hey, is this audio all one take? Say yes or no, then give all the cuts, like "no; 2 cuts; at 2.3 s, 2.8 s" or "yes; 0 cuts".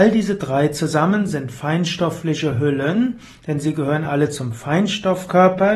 yes; 0 cuts